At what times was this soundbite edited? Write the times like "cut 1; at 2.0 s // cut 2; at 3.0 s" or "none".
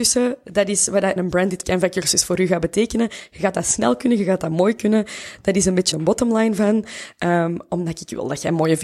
cut 1; at 1.2 s // cut 2; at 1.6 s // cut 3; at 5.9 s

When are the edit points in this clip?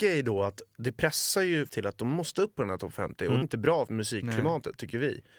cut 1; at 1.7 s // cut 2; at 3.4 s // cut 3; at 3.9 s

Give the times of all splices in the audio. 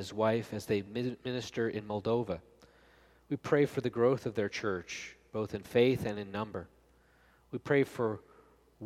none

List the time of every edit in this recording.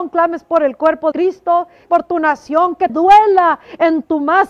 cut 1; at 1.1 s // cut 2; at 1.9 s // cut 3; at 2.9 s

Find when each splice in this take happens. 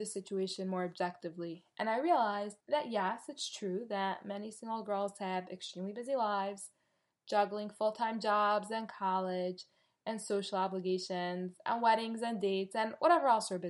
cut 1; at 2.6 s

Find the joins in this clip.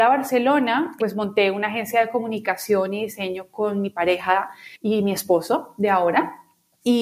cut 1; at 4.8 s

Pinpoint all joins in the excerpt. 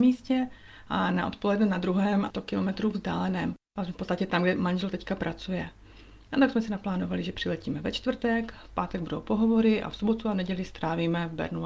cut 1; at 2.3 s

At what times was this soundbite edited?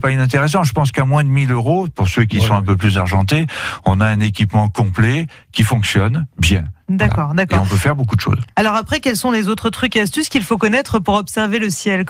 none

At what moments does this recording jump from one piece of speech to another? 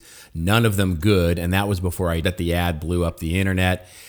cut 1; at 2.2 s

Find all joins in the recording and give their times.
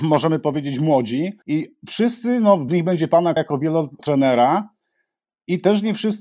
cut 1; at 1.4 s // cut 2; at 2.7 s // cut 3; at 3.4 s // cut 4; at 4.0 s

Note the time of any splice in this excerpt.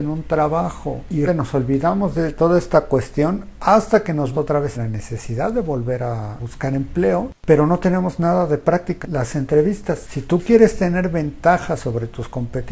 cut 1; at 1.3 s // cut 2; at 4.3 s // cut 3; at 4.7 s // cut 4; at 9.0 s

